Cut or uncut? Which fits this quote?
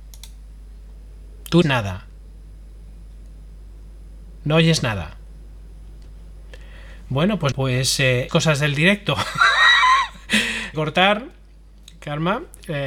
cut